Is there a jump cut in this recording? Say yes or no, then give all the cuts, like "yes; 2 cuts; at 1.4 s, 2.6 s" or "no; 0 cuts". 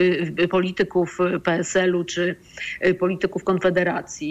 no; 0 cuts